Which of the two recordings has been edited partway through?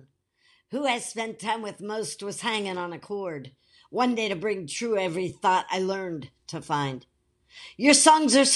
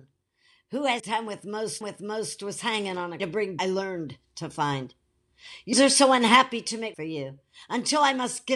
second; 6 cuts; at 1.0 s, 1.8 s, 3.2 s, 3.6 s, 5.7 s, 6.9 s

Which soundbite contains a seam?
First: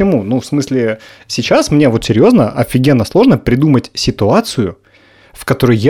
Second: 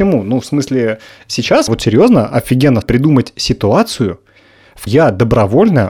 second; 3 cuts; at 1.7 s, 2.8 s, 4.9 s

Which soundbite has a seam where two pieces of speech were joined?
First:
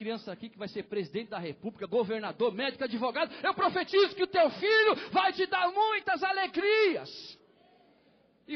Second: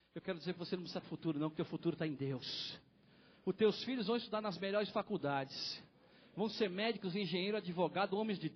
second; 1 cut; at 1.0 s

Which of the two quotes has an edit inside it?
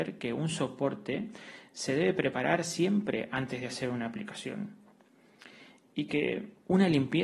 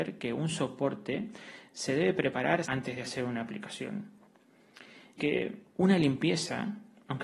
second; 2 cuts; at 2.6 s, 5.2 s

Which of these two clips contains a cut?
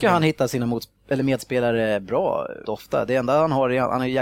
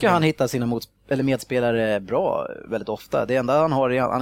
first; 1 cut; at 2.6 s

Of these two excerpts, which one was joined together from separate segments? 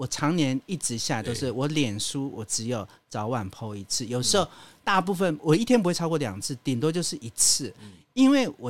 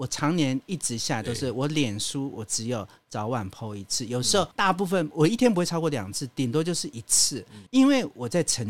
second; 2 cuts; at 4.5 s, 7.7 s

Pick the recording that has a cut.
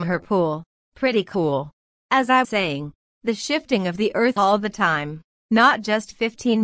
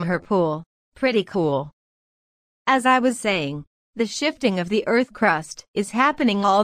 first; 3 cuts; at 1.9 s, 2.4 s, 4.4 s

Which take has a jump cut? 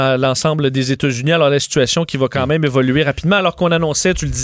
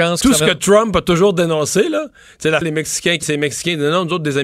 second; 2 cuts; at 2.6 s, 3.2 s

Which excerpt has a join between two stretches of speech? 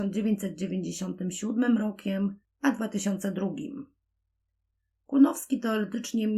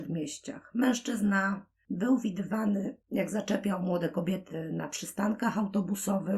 second; 1 cut; at 3.0 s

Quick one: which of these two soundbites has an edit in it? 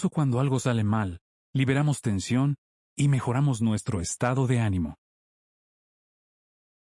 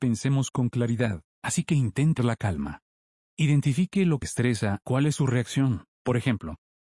second; 6 cuts; at 1.3 s, 2.2 s, 2.9 s, 4.2 s, 4.8 s, 5.9 s

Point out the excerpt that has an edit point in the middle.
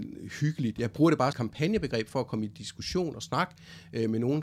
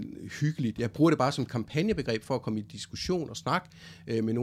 first; 1 cut; at 1.3 s

